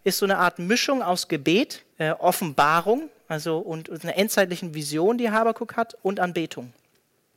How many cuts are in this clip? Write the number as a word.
one